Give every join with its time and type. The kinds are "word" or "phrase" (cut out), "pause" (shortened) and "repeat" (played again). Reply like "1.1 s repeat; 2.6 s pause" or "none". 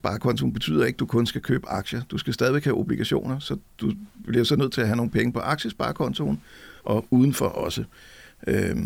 6.8 s pause

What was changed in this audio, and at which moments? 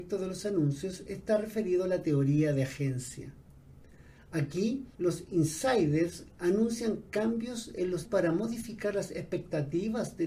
4.9 s pause; 8.0 s word

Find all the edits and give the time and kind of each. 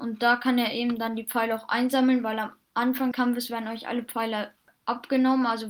3.1 s word

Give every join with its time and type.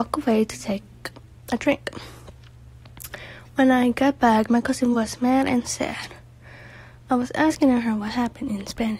none

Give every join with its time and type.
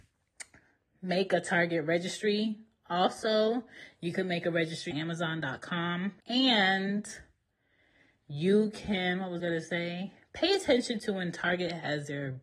4.9 s word; 6.2 s pause; 9.4 s word

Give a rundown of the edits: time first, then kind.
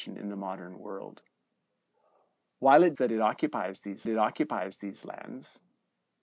2.9 s word; 4.0 s repeat

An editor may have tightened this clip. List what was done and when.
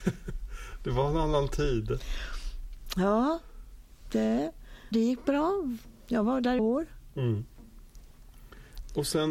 4.9 s word; 6.6 s phrase

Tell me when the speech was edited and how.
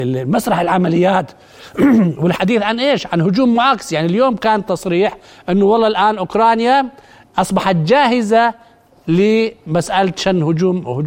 none

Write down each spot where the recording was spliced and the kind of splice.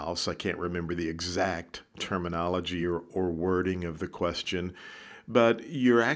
none

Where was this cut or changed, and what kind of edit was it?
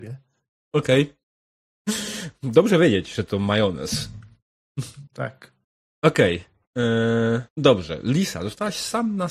5.1 s pause; 7.5 s pause

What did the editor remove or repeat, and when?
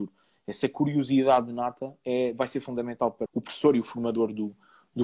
3.3 s word

